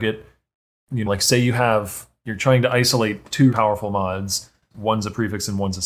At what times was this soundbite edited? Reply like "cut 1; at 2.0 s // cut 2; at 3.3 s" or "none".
cut 1; at 1.1 s // cut 2; at 3.5 s // cut 3; at 4.7 s